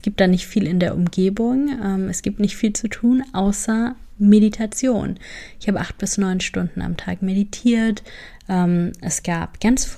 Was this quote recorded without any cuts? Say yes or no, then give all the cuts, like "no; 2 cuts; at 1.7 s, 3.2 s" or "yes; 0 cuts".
yes; 0 cuts